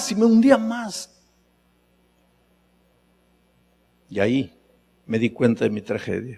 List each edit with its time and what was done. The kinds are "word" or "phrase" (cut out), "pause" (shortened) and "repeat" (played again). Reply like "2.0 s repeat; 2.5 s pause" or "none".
none